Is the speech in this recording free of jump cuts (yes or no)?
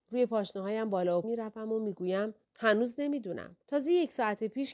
no